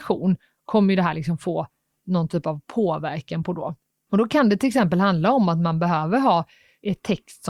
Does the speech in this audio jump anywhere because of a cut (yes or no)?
no